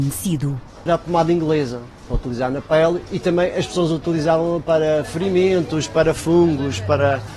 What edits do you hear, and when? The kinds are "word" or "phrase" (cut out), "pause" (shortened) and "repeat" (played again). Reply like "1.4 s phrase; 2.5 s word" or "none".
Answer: none